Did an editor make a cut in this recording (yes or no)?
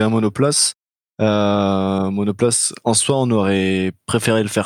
no